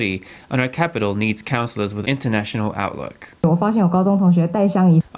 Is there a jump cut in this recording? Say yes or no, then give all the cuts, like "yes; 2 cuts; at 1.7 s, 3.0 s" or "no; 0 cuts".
yes; 1 cut; at 2.0 s